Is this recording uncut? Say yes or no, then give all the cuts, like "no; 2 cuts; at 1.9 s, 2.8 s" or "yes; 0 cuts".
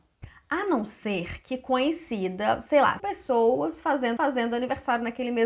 no; 2 cuts; at 3.0 s, 4.2 s